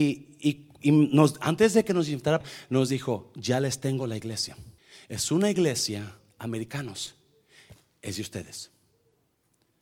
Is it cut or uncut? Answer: cut